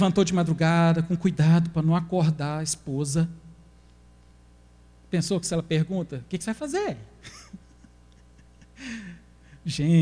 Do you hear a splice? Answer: no; 0 cuts

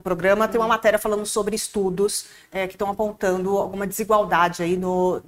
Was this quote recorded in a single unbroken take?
yes; 0 cuts

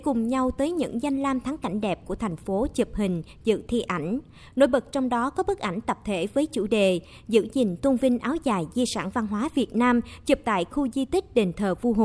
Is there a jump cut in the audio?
no; 0 cuts

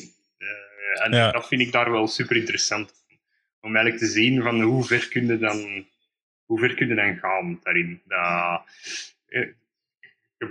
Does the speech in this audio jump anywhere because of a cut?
no; 0 cuts

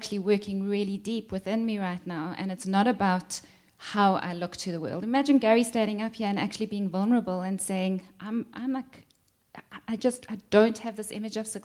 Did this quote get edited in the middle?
no; 0 cuts

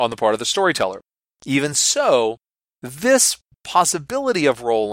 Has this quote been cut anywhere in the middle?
no; 0 cuts

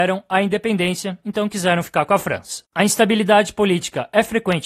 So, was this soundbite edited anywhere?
no; 0 cuts

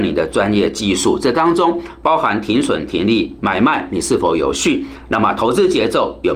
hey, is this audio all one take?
yes; 0 cuts

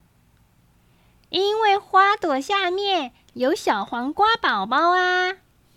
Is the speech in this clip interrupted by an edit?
no; 0 cuts

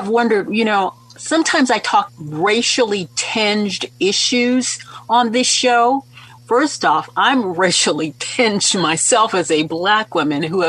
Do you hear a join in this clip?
yes; 2 cuts; at 2.1 s, 6.4 s

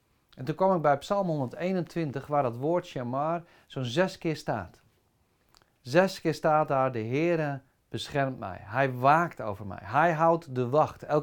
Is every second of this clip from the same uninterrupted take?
yes; 0 cuts

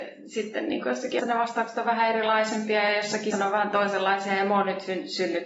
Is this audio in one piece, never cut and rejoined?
no; 2 cuts; at 1.2 s, 3.3 s

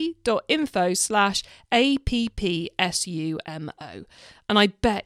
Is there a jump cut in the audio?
no; 0 cuts

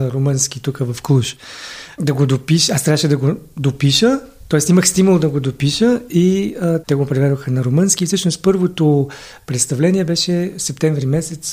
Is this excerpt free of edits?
yes; 0 cuts

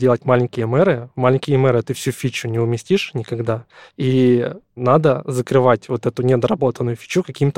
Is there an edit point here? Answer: no; 0 cuts

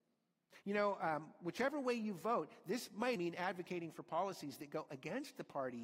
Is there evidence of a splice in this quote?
yes; 1 cut; at 3.2 s

